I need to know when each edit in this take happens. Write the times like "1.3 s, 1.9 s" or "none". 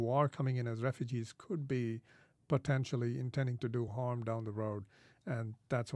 none

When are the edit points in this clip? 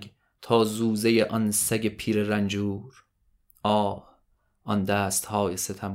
none

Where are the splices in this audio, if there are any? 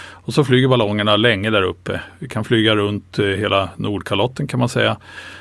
none

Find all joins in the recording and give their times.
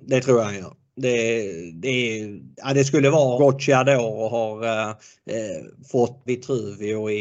2.5 s, 3.4 s, 5.0 s, 6.3 s

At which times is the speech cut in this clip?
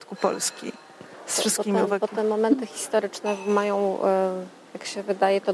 none

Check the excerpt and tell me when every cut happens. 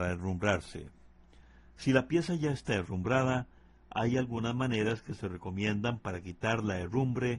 none

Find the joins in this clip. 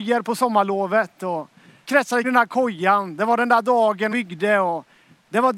1.8 s, 2.2 s, 4.1 s

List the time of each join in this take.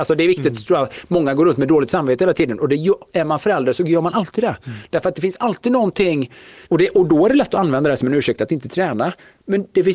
6.7 s

